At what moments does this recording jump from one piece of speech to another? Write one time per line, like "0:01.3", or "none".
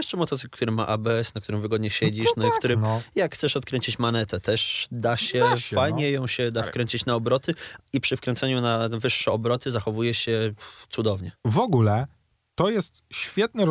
0:11.4